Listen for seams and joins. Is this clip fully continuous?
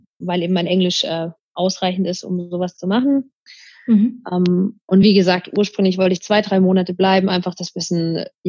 yes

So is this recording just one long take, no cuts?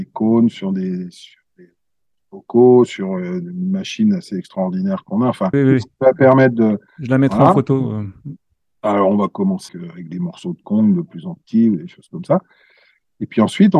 no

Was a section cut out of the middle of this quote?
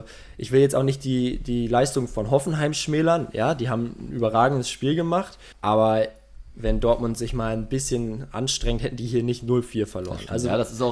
yes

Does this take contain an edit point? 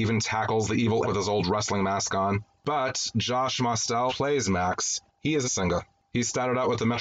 yes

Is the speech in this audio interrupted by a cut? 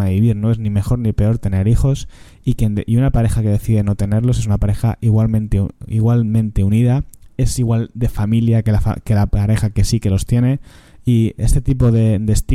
no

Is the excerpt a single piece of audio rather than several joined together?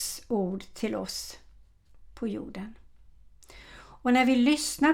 yes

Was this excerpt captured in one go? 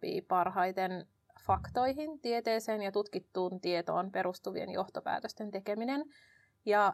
yes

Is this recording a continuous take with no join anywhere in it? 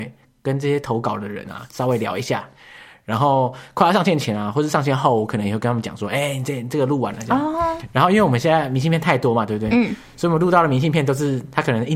yes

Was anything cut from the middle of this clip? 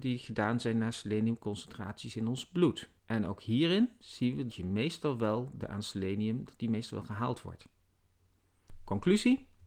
yes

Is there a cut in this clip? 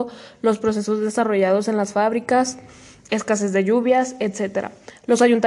no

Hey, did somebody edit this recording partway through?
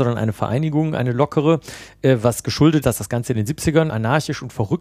yes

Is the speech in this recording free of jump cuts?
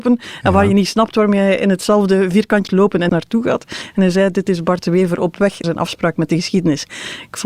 no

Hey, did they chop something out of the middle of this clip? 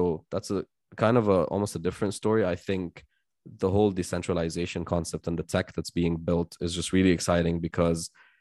no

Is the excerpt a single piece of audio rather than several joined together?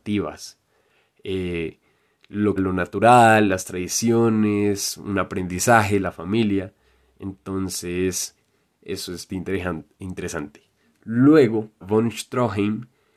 no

